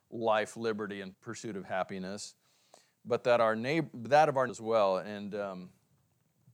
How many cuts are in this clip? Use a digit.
2